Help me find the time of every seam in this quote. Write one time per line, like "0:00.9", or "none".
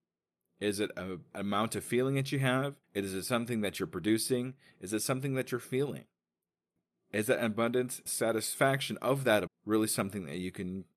0:02.8
0:08.1
0:09.5